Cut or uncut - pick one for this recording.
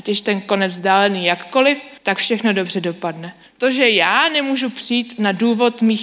cut